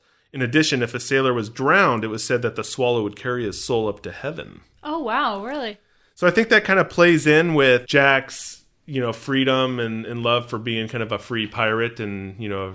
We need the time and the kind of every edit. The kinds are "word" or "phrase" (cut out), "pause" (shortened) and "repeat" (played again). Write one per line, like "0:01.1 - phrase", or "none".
none